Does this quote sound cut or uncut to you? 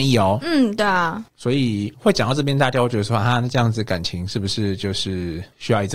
cut